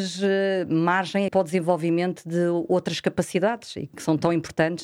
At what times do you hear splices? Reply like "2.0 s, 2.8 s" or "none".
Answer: 1.3 s